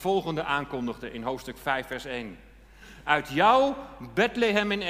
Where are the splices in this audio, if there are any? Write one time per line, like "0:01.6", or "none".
none

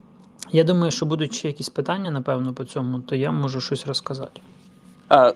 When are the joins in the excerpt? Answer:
none

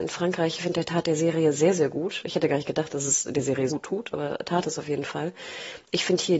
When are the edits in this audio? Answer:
0:03.7

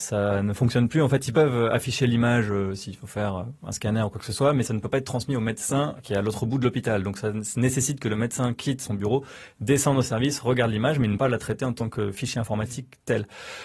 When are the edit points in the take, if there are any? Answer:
0:11.2

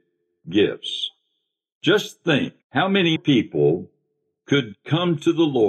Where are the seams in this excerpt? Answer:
0:02.6
0:03.2

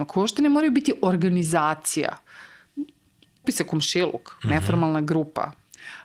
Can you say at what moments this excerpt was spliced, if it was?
0:03.4

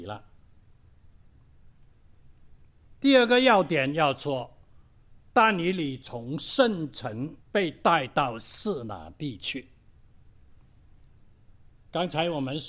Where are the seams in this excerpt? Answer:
0:03.0
0:07.4

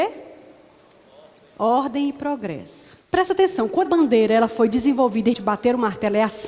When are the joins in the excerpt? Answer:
0:03.0
0:03.9
0:05.3

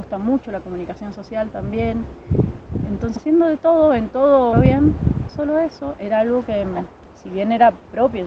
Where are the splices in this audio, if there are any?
0:03.2
0:04.5
0:05.3
0:06.0

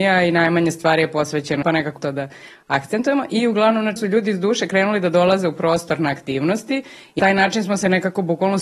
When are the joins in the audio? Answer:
0:01.6
0:02.0
0:04.0
0:07.2

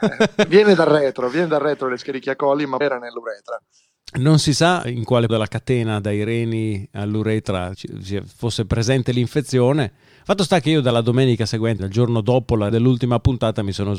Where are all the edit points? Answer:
0:02.8
0:04.8
0:05.3
0:07.7
0:11.8
0:12.7

